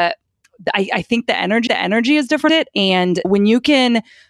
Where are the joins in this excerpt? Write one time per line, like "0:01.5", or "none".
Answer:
0:01.7
0:02.5
0:03.2